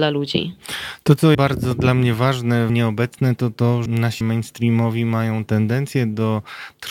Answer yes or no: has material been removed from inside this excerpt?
yes